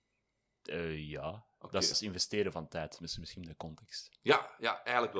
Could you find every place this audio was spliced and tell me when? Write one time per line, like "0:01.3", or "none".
0:01.9